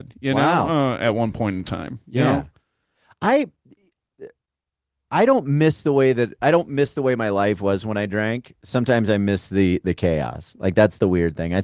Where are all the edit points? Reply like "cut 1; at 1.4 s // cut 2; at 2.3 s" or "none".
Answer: none